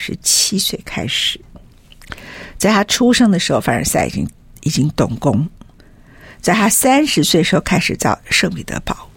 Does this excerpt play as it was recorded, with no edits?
yes; 0 cuts

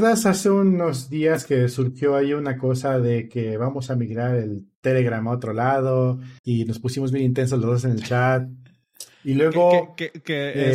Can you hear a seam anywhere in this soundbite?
yes; 1 cut; at 6.4 s

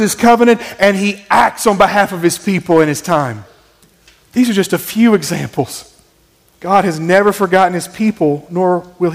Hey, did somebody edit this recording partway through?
yes; 2 cuts; at 3.8 s, 6.1 s

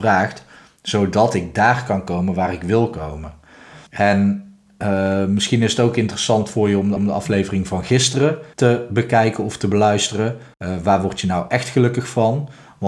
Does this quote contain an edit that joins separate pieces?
yes; 4 cuts; at 3.9 s, 7.0 s, 8.5 s, 10.5 s

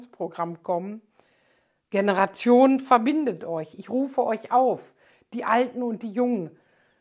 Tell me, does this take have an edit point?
no; 0 cuts

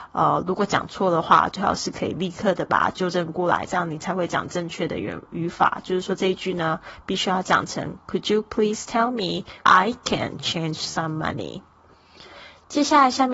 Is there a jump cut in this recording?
yes; 1 cut; at 9.6 s

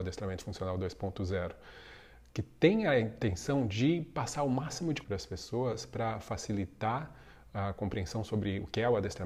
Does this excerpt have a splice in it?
yes; 1 cut; at 5.0 s

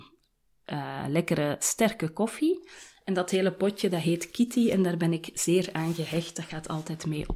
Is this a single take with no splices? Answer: yes; 0 cuts

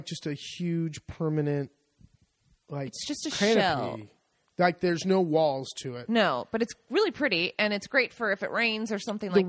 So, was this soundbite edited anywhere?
no; 0 cuts

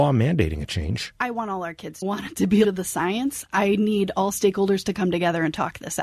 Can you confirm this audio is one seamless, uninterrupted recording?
no; 2 cuts; at 2.0 s, 2.6 s

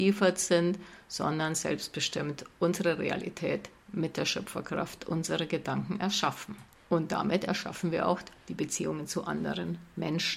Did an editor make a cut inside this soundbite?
no; 0 cuts

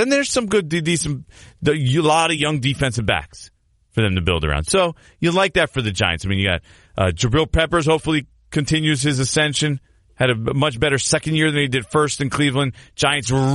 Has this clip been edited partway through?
no; 0 cuts

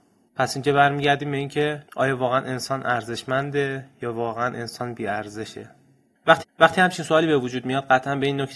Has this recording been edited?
yes; 2 cuts; at 1.9 s, 6.4 s

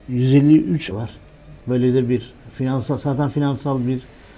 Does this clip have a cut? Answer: yes; 1 cut; at 0.9 s

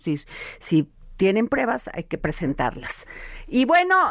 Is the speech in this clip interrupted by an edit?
no; 0 cuts

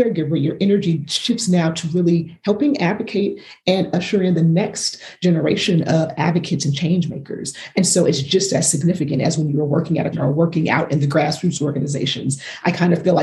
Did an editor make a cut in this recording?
yes; 1 cut; at 10.1 s

